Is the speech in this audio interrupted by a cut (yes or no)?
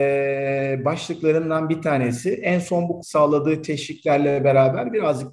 yes